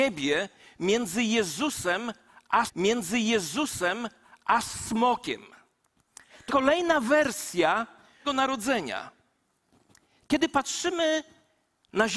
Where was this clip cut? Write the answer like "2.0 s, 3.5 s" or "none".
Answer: 2.7 s, 6.5 s, 8.2 s

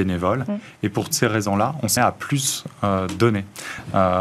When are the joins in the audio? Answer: 1.1 s, 2.0 s

